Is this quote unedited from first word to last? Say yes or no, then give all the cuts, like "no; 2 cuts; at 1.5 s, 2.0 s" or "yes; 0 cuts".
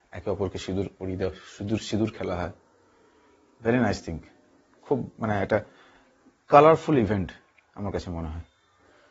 yes; 0 cuts